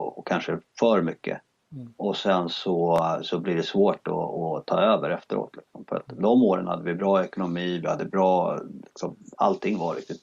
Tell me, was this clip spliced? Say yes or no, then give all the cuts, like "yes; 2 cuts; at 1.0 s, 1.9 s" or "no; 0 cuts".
no; 0 cuts